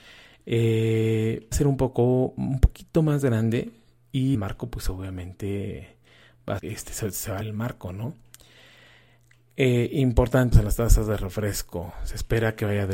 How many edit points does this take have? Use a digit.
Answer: 5